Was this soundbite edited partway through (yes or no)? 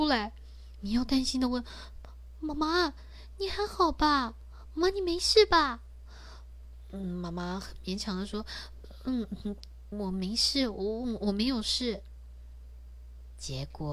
yes